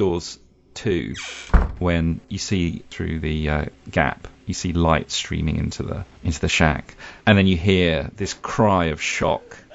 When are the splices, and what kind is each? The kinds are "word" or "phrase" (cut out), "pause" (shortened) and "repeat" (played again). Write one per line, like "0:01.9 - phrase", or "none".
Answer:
0:03.8 - pause
0:07.2 - pause

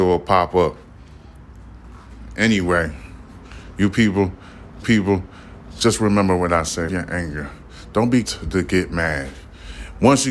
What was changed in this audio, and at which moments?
0:04.8 - repeat
0:06.9 - word
0:08.2 - word

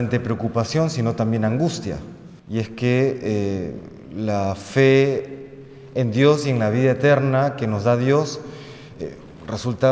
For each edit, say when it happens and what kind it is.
0:02.4 - pause

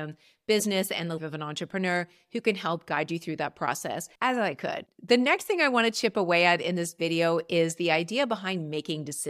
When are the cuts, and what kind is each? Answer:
0:01.2 - word
0:04.2 - pause

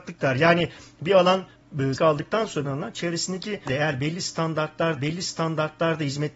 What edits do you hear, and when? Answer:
0:02.0 - word
0:02.6 - phrase
0:03.7 - word
0:05.0 - repeat

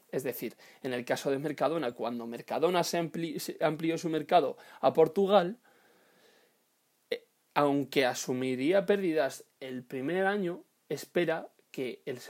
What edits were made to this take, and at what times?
none

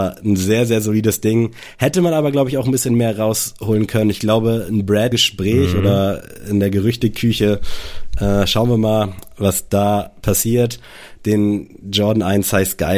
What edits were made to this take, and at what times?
0:05.1 - phrase

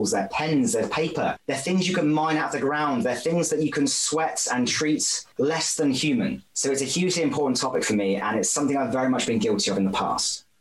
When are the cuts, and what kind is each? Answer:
none

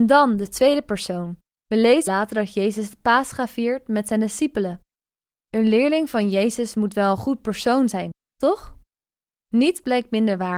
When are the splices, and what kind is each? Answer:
0:02.1 - word

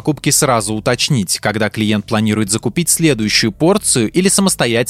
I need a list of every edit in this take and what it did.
none

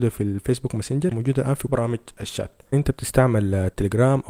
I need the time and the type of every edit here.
0:01.1 - word
0:01.7 - word
0:02.7 - word

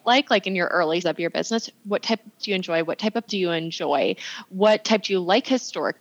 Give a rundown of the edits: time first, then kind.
0:01.0 - word
0:02.4 - word
0:03.3 - word

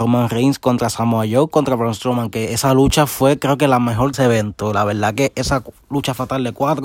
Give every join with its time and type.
0:04.1 - phrase

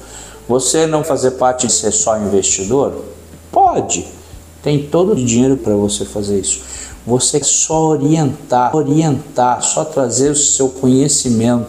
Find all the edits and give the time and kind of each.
0:01.0 - word
0:01.7 - phrase
0:05.2 - word
0:05.6 - word
0:07.4 - word
0:08.7 - repeat

